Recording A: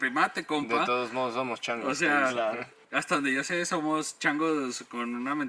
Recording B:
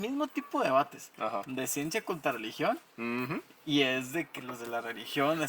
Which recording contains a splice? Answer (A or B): A